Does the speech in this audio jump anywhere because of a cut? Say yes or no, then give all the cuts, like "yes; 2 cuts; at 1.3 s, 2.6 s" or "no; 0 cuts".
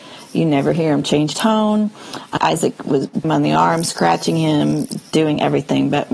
yes; 4 cuts; at 1.3 s, 2.4 s, 3.2 s, 5.0 s